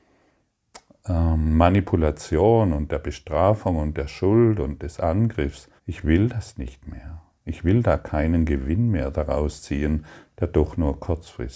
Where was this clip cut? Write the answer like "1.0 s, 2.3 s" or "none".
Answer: 5.8 s